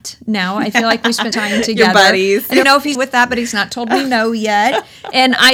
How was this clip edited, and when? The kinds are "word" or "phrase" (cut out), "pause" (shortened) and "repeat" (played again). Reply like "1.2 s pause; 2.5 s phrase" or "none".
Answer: 1.3 s word; 2.6 s word; 2.9 s word

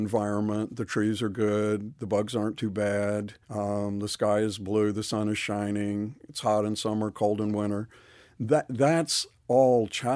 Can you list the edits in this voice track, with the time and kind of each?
3.4 s pause

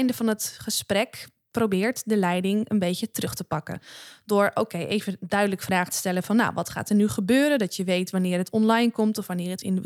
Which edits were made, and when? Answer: none

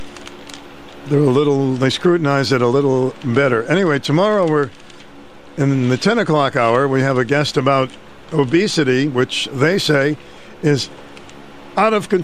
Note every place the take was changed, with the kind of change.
none

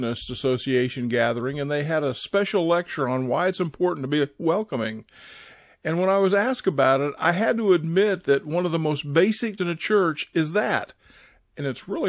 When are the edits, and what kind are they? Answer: 9.6 s phrase

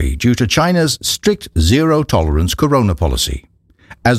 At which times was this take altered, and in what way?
none

